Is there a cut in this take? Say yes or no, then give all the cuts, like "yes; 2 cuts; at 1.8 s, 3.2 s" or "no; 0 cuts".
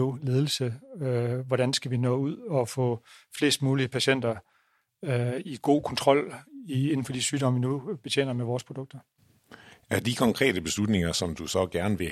no; 0 cuts